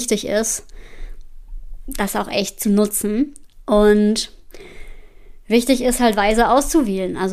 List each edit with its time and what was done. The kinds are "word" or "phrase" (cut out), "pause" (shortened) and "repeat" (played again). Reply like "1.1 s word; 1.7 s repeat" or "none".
none